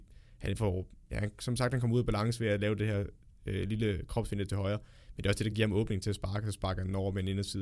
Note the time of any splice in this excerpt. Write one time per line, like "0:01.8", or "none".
none